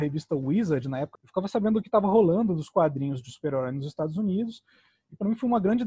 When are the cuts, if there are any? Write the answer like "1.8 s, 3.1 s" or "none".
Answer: 1.1 s